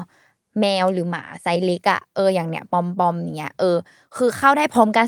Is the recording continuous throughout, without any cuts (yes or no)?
yes